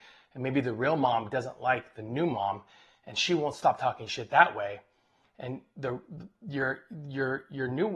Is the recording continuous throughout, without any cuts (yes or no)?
yes